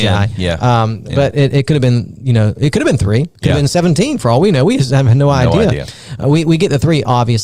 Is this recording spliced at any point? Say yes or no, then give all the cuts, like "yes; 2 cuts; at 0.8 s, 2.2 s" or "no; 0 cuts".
no; 0 cuts